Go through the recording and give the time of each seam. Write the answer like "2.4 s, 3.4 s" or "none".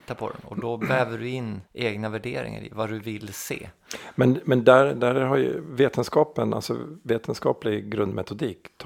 1.7 s